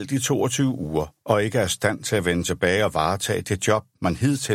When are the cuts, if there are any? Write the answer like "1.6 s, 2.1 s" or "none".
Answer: none